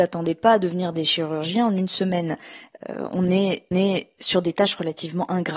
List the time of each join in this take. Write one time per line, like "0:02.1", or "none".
0:03.7